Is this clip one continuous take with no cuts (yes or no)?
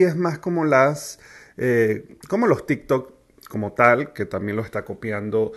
yes